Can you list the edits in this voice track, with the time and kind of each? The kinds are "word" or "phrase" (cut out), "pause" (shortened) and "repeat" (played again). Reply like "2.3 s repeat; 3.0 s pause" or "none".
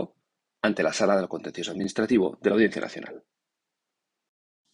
none